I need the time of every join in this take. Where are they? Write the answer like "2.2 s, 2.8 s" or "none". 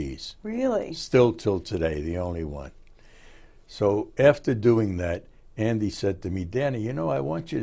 none